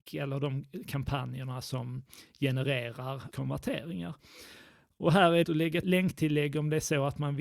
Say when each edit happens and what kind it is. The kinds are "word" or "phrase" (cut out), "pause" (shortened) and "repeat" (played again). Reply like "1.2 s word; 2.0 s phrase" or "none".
3.3 s word; 5.4 s phrase; 5.8 s word

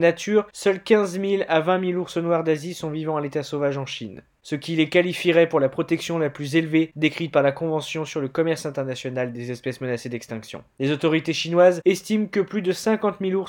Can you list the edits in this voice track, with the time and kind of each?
none

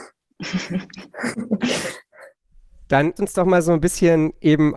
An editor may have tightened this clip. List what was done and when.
3.2 s word

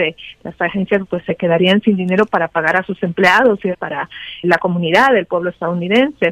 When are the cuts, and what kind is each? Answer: 1.0 s word; 3.7 s phrase; 4.4 s word

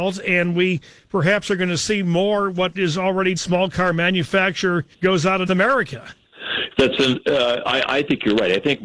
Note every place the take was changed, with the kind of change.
2.7 s word; 3.4 s phrase; 4.9 s pause; 5.5 s word

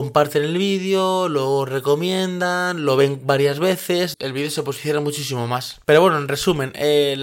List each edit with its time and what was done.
4.1 s word

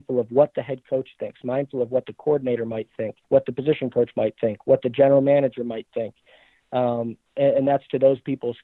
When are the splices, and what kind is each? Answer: 3.2 s pause

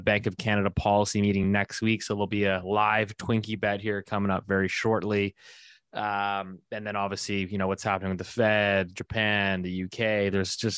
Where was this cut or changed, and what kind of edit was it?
none

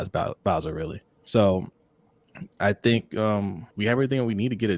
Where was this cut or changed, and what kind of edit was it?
1.1 s pause; 3.7 s pause

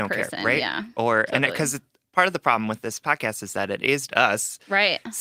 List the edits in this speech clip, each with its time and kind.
4.1 s word

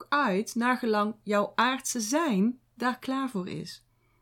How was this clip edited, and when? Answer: none

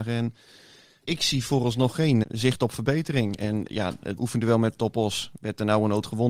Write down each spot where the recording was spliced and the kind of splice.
1.1 s word; 2.2 s word; 3.7 s word; 4.2 s word

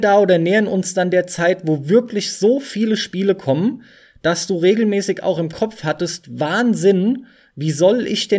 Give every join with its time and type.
none

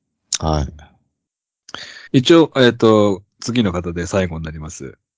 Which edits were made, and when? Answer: 2.1 s pause

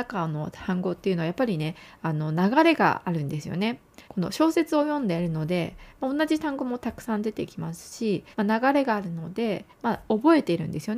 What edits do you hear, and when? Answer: 4.0 s pause; 8.3 s pause; 9.7 s pause

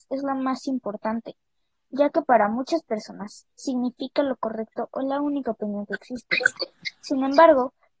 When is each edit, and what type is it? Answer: none

